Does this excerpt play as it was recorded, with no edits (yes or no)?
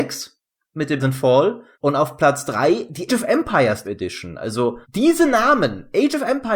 no